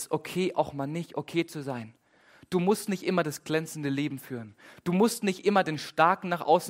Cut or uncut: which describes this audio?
uncut